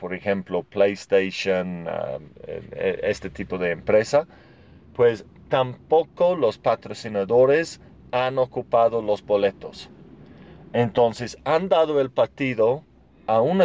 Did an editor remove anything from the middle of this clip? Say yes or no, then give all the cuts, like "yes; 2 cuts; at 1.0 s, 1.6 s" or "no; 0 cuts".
no; 0 cuts